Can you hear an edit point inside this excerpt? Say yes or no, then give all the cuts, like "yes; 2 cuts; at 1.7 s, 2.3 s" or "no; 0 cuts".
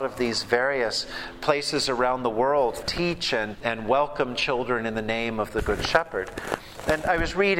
yes; 2 cuts; at 2.8 s, 3.5 s